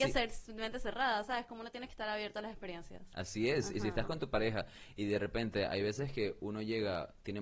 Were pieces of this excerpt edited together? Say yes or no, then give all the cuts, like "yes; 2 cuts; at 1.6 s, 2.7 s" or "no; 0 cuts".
no; 0 cuts